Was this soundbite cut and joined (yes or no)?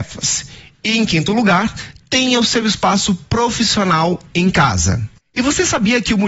no